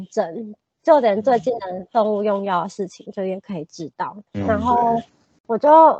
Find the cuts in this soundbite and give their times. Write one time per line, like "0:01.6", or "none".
0:04.3